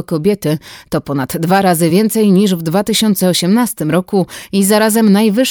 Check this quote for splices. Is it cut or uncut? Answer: uncut